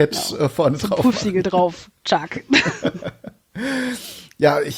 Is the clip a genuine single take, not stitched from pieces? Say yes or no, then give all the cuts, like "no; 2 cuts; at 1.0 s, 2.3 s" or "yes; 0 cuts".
yes; 0 cuts